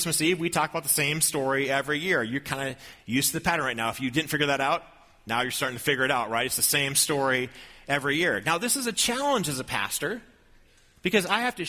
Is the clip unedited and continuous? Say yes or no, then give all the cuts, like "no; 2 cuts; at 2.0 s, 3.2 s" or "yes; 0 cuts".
yes; 0 cuts